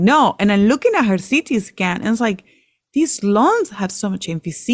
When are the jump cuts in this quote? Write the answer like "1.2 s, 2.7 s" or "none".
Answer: none